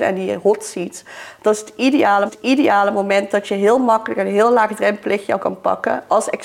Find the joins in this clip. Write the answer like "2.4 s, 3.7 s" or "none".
2.3 s, 5.4 s